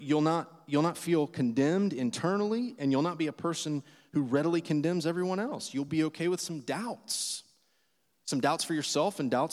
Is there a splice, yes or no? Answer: no